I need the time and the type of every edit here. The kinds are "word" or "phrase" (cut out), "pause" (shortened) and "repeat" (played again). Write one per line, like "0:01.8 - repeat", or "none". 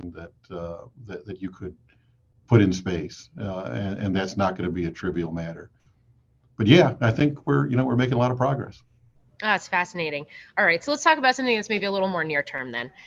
none